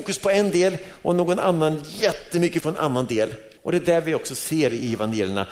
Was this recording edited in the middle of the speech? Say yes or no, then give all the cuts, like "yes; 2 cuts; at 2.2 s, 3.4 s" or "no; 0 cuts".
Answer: yes; 2 cuts; at 2.6 s, 3.6 s